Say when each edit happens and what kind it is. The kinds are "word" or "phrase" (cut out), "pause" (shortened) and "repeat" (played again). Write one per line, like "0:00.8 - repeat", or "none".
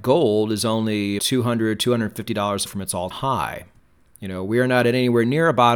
0:01.2 - word
0:02.7 - word
0:03.1 - word